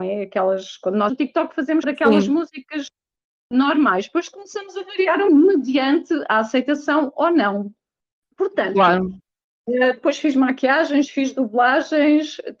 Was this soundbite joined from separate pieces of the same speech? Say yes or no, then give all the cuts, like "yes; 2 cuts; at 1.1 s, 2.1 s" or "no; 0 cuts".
yes; 3 cuts; at 1.1 s, 1.8 s, 5.3 s